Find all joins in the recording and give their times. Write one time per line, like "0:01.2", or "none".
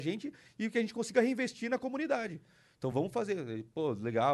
none